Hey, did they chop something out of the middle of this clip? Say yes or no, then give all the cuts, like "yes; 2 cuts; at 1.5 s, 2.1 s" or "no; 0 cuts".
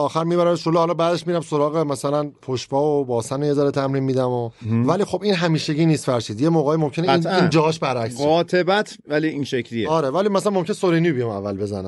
no; 0 cuts